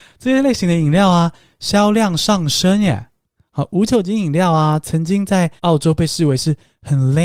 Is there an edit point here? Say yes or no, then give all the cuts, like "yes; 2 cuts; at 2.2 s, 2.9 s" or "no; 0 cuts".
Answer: yes; 2 cuts; at 3.4 s, 5.6 s